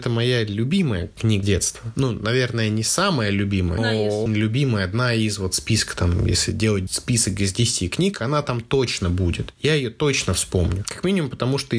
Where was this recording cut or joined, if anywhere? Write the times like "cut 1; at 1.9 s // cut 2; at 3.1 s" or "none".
cut 1; at 1.4 s // cut 2; at 3.8 s // cut 3; at 4.3 s